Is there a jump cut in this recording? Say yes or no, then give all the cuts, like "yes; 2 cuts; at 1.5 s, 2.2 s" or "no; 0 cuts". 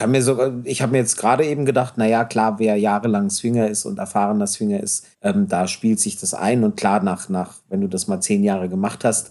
yes; 1 cut; at 5.1 s